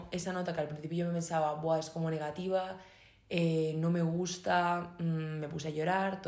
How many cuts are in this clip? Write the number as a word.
zero